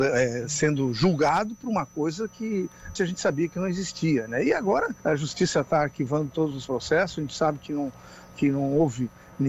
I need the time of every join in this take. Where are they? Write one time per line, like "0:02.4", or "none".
0:03.0
0:05.0